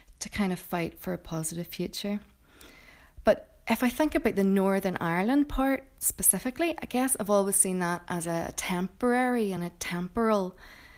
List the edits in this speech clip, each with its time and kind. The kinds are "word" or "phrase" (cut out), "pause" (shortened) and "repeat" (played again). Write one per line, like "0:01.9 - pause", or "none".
none

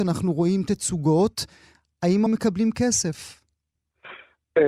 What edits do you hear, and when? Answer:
0:02.3 - word

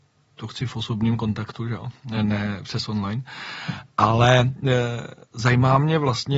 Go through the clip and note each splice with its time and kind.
none

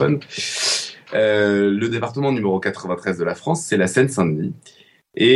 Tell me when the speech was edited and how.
none

